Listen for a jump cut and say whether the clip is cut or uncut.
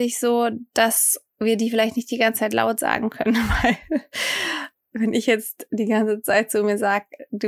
uncut